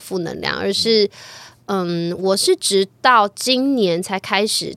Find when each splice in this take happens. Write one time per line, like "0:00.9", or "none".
none